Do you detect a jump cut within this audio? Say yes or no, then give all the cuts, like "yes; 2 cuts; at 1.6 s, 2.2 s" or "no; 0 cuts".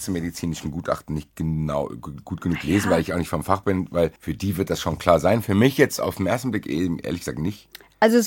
yes; 1 cut; at 4.2 s